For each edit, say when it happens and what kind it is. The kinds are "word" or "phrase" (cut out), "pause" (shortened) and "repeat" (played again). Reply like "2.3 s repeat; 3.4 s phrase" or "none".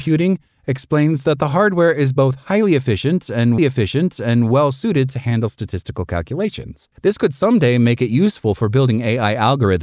3.6 s repeat; 6.9 s pause